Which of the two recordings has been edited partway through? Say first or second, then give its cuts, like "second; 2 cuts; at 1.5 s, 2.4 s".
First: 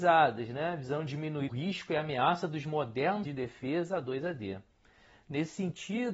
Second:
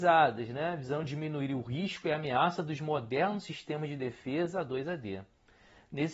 first; 2 cuts; at 1.5 s, 3.2 s